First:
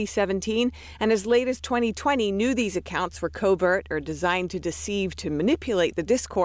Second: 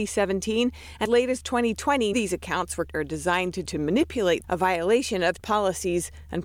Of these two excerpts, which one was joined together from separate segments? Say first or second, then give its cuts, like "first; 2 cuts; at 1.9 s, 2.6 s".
second; 6 cuts; at 1.0 s, 2.1 s, 2.9 s, 3.6 s, 4.4 s, 5.4 s